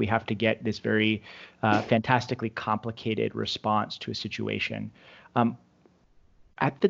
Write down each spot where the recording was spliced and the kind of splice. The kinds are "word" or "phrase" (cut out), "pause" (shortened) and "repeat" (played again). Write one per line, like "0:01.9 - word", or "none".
none